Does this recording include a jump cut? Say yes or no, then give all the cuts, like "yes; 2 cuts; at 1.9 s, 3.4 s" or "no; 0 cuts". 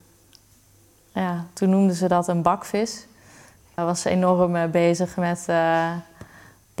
yes; 1 cut; at 3.8 s